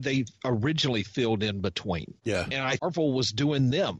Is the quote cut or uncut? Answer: cut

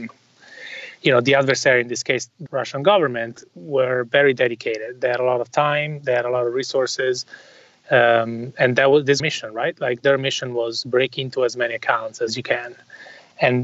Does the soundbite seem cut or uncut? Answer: cut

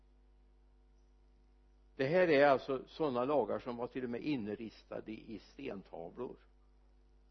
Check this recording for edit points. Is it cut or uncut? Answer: uncut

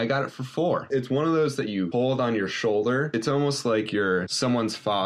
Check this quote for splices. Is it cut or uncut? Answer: uncut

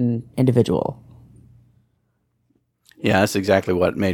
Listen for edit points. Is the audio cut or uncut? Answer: uncut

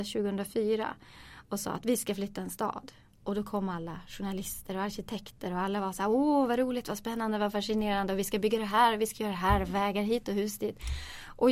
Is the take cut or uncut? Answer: uncut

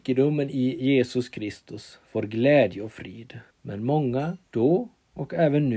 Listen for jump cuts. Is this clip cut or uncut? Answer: cut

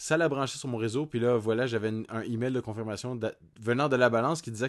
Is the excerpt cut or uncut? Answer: uncut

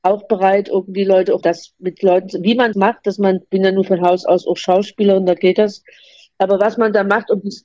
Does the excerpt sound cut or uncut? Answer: cut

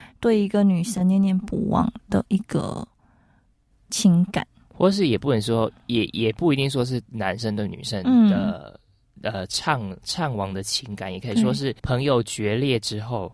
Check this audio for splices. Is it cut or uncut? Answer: cut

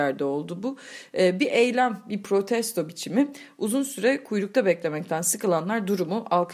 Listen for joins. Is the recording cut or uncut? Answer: uncut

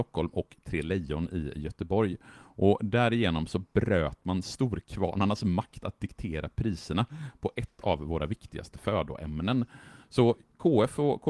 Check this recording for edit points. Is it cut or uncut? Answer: uncut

